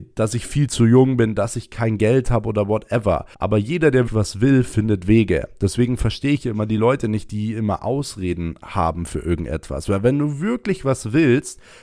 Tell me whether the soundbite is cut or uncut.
cut